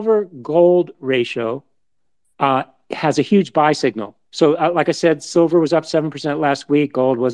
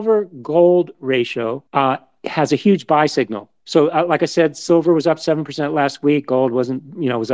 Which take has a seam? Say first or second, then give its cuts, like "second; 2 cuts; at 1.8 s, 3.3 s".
second; 1 cut; at 1.7 s